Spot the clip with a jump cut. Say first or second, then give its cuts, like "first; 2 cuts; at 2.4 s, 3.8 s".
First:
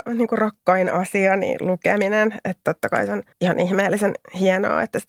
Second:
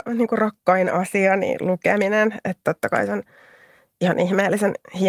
first; 1 cut; at 3.3 s